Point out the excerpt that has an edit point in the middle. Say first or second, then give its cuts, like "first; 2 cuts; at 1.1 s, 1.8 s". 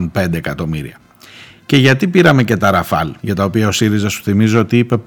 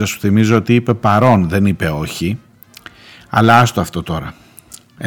first; 1 cut; at 3.2 s